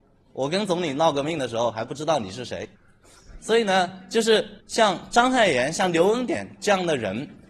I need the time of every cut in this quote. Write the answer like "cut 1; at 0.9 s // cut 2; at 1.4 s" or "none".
cut 1; at 2.7 s // cut 2; at 4.6 s